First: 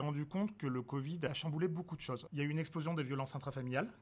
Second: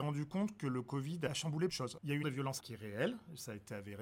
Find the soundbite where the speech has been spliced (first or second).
second